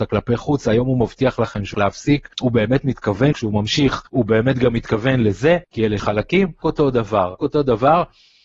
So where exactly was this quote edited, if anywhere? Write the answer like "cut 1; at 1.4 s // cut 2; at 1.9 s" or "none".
cut 1; at 1.7 s // cut 2; at 2.3 s // cut 3; at 3.3 s // cut 4; at 4.1 s // cut 5; at 5.6 s // cut 6; at 6.0 s // cut 7; at 6.6 s // cut 8; at 7.4 s